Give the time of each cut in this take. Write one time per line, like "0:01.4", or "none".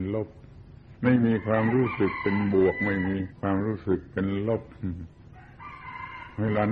0:01.0
0:03.3